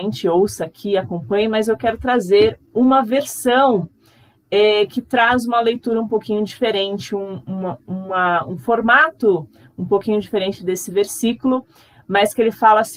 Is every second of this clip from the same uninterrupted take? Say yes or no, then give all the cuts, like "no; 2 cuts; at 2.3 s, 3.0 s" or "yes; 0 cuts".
yes; 0 cuts